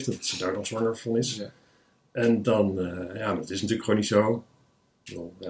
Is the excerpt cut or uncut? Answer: uncut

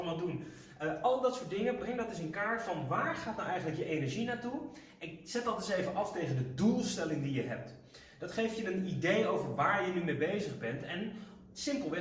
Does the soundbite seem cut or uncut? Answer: uncut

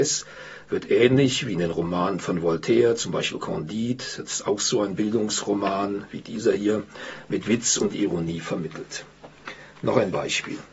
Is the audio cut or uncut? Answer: uncut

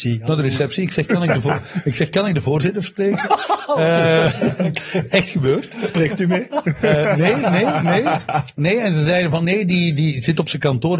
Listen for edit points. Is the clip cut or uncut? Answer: uncut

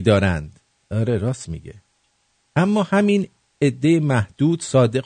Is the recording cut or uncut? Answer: uncut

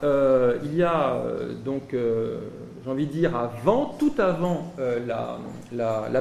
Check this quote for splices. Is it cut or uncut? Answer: uncut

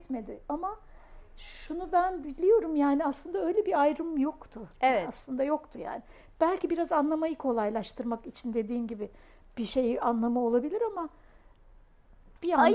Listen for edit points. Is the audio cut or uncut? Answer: uncut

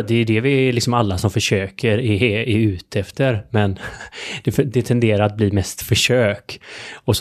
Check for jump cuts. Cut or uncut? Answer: uncut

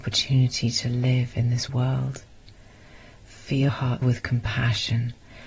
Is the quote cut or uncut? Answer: cut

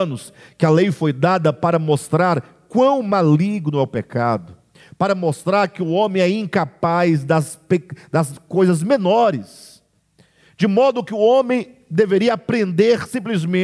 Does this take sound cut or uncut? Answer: uncut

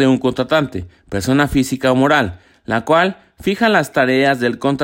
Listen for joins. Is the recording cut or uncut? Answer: uncut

